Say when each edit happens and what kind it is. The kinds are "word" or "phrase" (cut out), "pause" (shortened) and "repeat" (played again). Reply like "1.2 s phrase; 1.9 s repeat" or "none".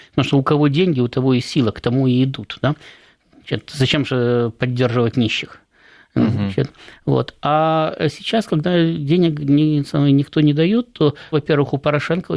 11.3 s word